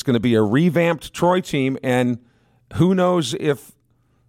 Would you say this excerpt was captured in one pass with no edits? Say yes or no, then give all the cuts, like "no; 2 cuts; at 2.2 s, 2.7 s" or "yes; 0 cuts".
yes; 0 cuts